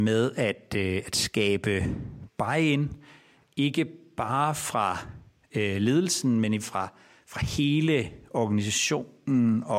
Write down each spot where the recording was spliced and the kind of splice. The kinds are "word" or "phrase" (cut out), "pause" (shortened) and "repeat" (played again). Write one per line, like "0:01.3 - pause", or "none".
0:06.6 - word